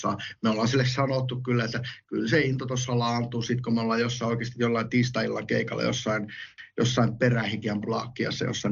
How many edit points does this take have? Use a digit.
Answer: 1